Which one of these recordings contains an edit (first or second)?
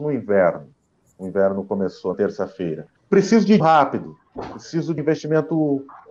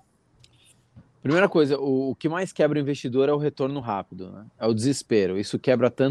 first